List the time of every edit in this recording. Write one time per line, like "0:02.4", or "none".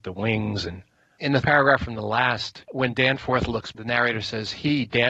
0:01.4
0:03.7